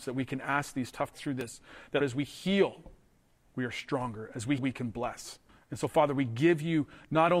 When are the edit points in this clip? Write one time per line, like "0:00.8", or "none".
0:01.1
0:02.0
0:03.3
0:04.6
0:05.5